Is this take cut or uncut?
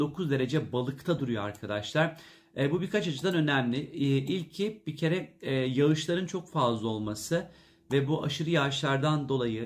uncut